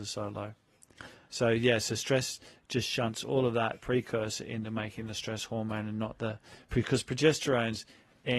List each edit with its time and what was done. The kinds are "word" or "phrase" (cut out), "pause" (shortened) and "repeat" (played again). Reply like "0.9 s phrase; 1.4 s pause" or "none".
none